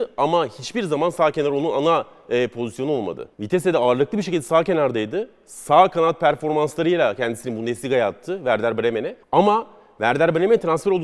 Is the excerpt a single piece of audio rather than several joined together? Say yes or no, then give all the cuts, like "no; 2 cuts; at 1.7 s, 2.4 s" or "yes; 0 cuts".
no; 2 cuts; at 3.3 s, 9.2 s